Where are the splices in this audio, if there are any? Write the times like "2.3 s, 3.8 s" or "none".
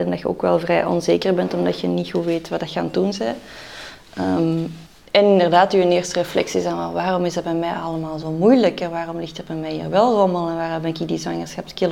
4.9 s